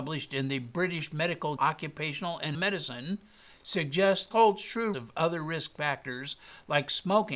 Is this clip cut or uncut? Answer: cut